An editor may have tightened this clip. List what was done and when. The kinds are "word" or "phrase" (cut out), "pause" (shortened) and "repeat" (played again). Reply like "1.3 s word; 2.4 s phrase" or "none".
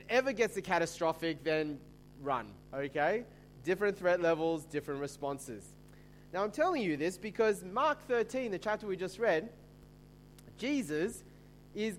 2.6 s pause